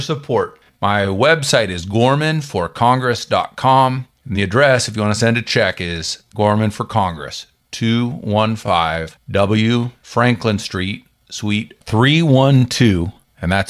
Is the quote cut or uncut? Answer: uncut